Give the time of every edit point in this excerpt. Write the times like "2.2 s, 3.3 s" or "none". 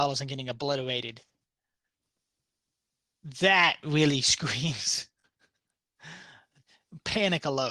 none